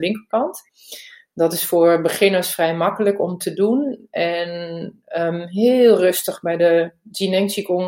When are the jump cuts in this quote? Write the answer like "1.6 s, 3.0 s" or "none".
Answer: none